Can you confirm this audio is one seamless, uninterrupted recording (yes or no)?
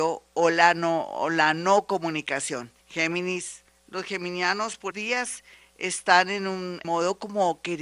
no